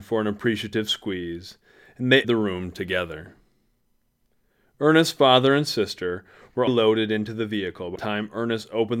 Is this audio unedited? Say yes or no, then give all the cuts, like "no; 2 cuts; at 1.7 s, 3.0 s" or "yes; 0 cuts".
no; 3 cuts; at 2.2 s, 6.7 s, 8.0 s